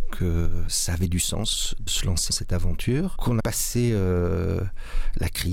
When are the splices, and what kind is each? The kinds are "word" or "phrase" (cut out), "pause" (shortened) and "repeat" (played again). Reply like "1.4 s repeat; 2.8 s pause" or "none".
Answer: 1.9 s word; 2.3 s word; 3.4 s phrase